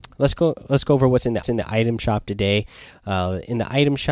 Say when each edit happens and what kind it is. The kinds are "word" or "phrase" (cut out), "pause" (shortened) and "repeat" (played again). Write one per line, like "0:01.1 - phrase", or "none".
0:01.4 - repeat